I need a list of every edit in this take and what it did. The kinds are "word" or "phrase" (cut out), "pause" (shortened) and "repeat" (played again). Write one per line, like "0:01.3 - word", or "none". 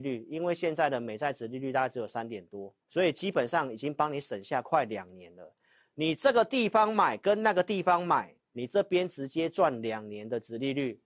0:02.8 - pause